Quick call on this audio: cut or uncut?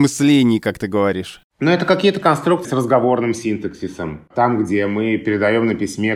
cut